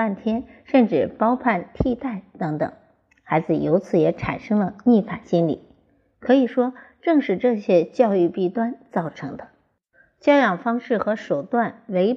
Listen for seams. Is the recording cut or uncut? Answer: uncut